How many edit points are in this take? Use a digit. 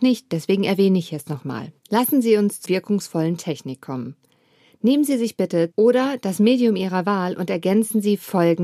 3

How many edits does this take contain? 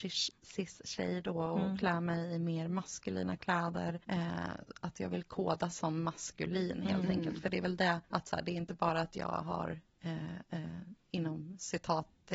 3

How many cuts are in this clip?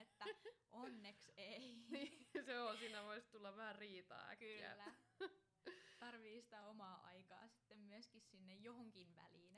0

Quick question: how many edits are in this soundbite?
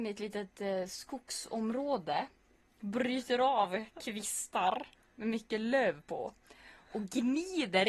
0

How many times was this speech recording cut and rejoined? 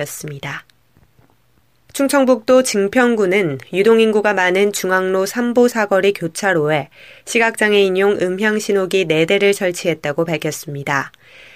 0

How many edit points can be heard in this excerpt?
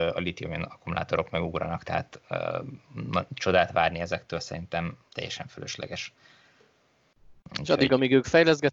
1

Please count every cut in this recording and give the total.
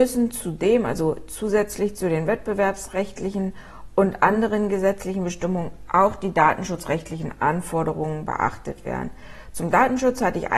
0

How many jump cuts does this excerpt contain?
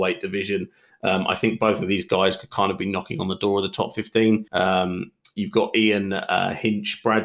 1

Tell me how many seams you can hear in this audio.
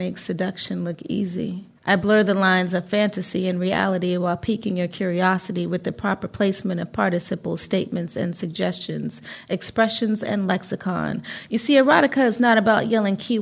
1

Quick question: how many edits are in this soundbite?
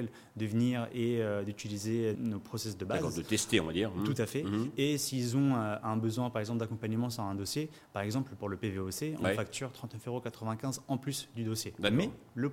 1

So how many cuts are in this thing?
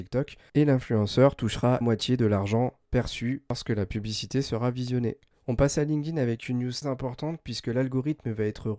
3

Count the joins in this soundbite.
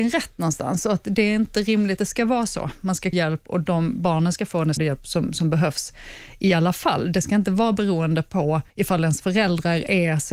4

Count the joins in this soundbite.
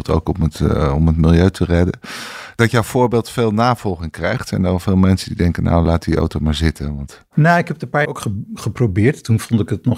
1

